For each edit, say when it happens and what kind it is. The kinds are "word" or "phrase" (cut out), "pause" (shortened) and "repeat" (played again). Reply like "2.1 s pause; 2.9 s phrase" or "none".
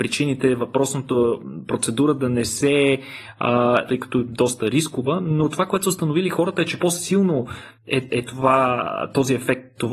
3.9 s phrase; 6.8 s word; 8.1 s word